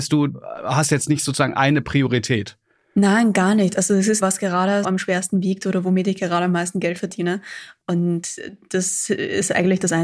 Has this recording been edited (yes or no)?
yes